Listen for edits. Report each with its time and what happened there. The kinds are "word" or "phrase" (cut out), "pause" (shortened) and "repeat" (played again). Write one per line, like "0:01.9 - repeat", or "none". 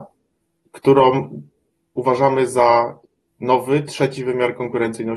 none